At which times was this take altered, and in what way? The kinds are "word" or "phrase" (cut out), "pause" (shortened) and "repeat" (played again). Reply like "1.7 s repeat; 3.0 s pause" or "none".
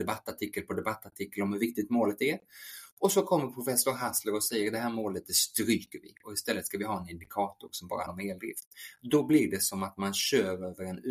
8.1 s word

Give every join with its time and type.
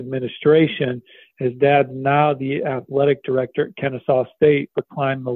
none

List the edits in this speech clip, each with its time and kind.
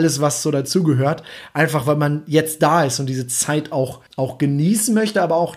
4.1 s pause

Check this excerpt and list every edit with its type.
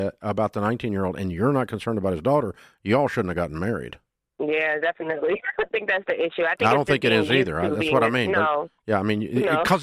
5.7 s phrase

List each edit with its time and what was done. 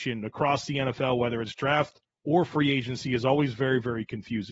2.1 s pause

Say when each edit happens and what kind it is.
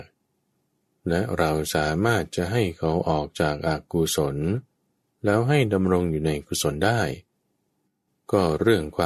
none

